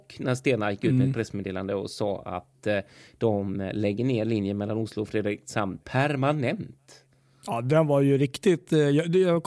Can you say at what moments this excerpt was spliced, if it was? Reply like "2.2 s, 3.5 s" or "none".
none